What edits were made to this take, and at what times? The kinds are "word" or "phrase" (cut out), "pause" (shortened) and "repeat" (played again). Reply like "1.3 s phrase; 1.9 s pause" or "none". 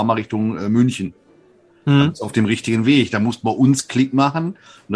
none